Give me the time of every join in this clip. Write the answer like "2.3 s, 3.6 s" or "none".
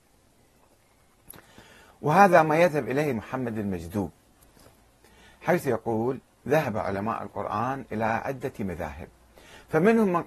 3.1 s